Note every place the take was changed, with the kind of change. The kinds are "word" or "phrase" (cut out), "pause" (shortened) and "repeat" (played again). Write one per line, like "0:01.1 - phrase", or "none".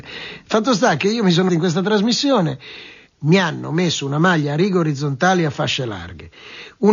0:01.5 - word